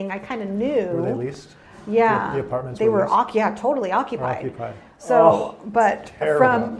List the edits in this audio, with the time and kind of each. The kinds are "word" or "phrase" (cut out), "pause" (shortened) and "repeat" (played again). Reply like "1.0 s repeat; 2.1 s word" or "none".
none